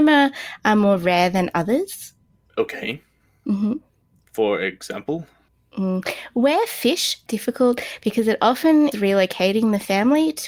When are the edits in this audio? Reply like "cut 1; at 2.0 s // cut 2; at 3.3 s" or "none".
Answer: cut 1; at 7.3 s // cut 2; at 8.9 s